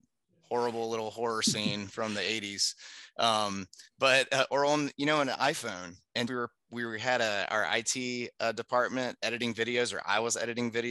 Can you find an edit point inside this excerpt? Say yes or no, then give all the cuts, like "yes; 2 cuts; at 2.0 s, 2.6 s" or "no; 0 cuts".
yes; 1 cut; at 6.3 s